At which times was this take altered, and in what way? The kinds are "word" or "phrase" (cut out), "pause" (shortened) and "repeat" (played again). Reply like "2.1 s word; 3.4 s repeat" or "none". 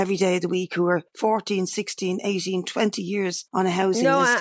1.1 s pause; 3.5 s pause

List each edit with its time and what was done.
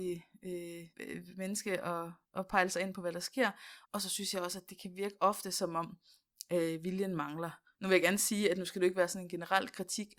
0.9 s pause; 2.2 s pause; 3.8 s pause

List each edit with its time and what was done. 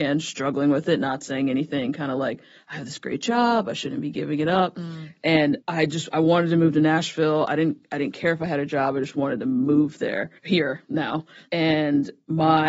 10.4 s pause

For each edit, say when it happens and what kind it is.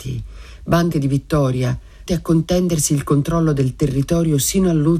0.9 s word; 2.1 s word

